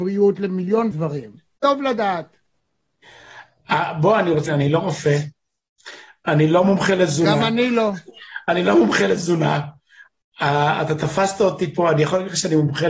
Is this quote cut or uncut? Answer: cut